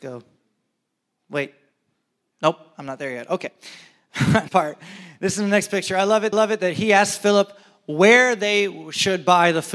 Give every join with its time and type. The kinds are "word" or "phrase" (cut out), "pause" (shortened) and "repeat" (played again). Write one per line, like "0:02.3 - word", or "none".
0:04.5 - word
0:06.3 - repeat